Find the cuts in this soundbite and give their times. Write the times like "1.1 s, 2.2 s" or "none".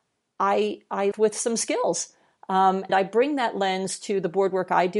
1.1 s, 2.9 s